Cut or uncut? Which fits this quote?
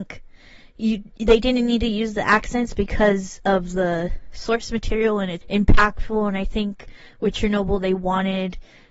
cut